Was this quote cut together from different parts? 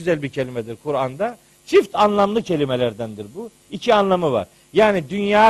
no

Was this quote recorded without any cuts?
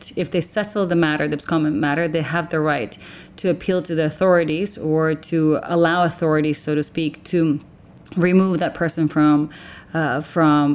yes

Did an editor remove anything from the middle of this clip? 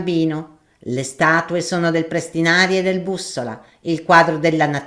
no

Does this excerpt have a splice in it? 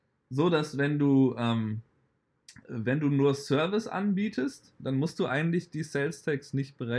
no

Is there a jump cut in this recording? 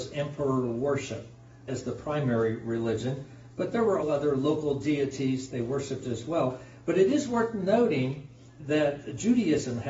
yes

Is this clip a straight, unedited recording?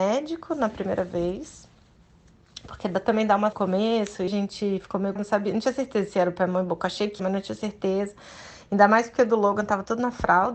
no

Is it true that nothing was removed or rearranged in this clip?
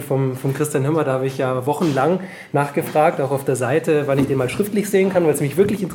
yes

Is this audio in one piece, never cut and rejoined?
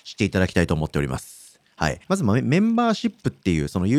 no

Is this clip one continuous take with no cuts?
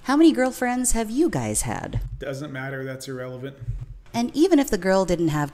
yes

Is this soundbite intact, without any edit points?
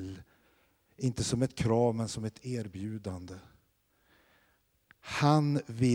yes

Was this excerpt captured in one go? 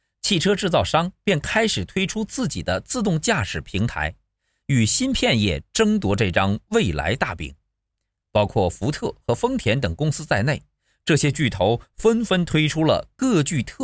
yes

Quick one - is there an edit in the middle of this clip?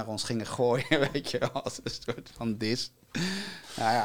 no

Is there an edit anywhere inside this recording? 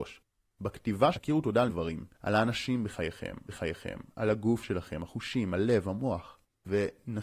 yes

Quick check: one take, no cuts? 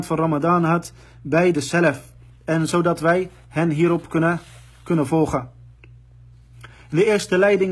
yes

